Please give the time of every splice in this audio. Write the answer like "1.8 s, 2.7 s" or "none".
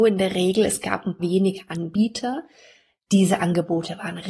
1.2 s